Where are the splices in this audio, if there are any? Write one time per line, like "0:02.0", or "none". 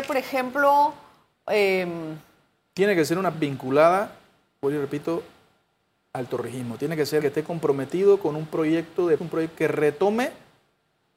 0:03.3
0:07.2
0:09.2
0:09.5

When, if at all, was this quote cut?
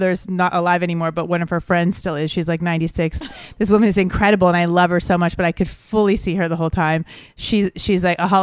none

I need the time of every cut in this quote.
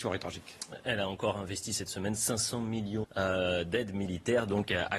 0:03.0

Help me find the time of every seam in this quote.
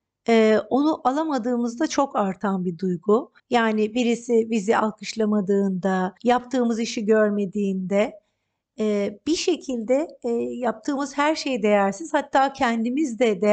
0:03.4
0:06.2

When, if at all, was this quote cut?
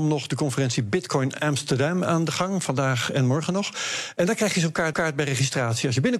0:04.9

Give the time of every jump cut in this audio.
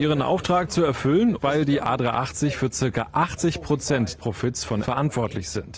0:01.4
0:04.2
0:04.8

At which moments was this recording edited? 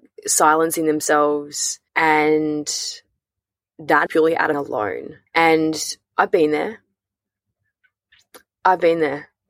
0:01.9
0:04.1
0:04.5
0:05.3

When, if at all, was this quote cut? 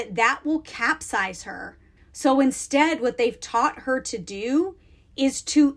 0:02.0

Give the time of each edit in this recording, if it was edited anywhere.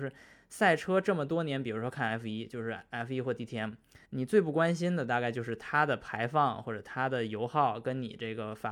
0:04.0

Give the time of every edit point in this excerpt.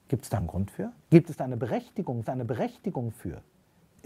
0:01.0
0:02.2

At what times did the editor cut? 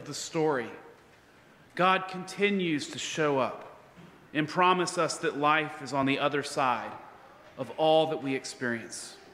none

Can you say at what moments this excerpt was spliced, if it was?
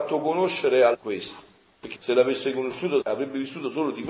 0:00.9
0:01.9
0:03.0

